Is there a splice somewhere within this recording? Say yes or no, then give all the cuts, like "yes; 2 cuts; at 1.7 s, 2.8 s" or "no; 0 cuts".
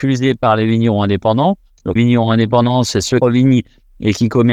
yes; 2 cuts; at 2.0 s, 3.2 s